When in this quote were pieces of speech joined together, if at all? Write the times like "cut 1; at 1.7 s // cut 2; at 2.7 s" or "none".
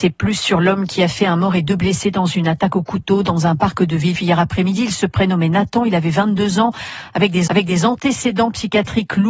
cut 1; at 4.1 s // cut 2; at 7.5 s